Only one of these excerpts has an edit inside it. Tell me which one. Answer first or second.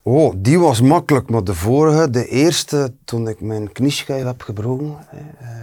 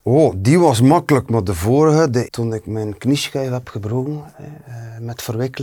second